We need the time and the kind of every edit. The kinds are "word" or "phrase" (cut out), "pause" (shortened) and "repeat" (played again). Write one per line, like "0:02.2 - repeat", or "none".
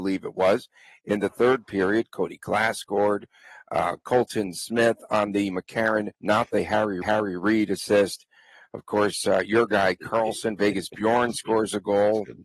0:06.1 - pause
0:07.0 - repeat